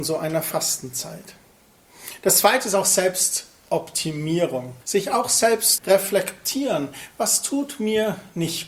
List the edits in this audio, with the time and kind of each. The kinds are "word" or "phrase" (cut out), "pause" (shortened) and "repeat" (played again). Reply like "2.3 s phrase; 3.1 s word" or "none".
4.8 s pause; 5.8 s word